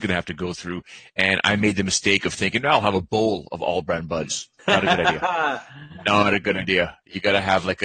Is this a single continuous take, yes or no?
no